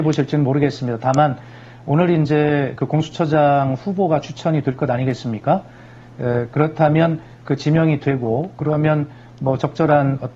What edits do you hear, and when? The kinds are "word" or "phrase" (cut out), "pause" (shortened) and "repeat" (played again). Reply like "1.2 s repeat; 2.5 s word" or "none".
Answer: none